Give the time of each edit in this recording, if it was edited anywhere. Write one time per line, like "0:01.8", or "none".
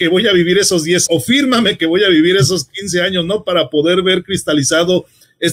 0:01.1